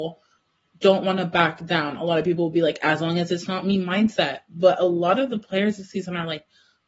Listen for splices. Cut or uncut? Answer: uncut